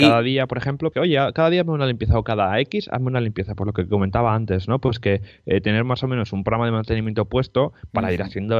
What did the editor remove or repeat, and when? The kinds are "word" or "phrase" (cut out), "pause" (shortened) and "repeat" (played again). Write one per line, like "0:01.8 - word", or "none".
0:00.9 - word